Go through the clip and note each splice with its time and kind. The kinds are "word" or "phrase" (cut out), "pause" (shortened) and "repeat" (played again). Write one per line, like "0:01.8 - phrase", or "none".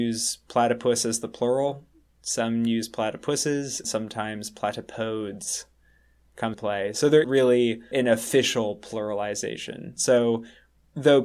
0:03.8 - word
0:06.5 - word
0:07.2 - word
0:07.9 - word